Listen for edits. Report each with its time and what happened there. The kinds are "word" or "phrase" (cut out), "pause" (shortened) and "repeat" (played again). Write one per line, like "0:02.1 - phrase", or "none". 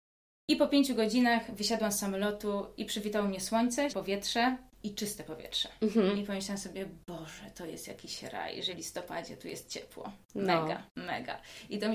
0:03.9 - word
0:08.7 - word
0:10.9 - pause